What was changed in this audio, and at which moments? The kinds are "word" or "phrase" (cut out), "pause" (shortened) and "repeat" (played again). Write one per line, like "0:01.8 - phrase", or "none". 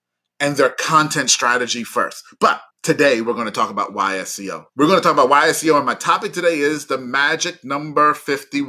0:02.7 - pause
0:04.7 - pause